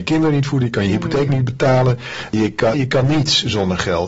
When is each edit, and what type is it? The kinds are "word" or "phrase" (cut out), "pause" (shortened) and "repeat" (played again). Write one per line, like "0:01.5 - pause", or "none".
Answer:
0:02.7 - word